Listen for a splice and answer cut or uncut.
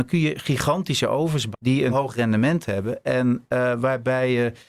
cut